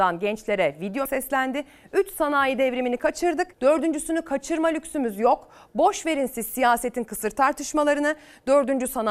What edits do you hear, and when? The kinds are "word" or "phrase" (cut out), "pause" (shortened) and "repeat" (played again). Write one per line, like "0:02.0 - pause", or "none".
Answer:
0:01.1 - word
0:03.5 - pause